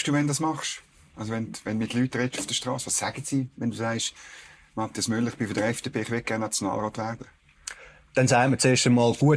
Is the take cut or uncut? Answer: uncut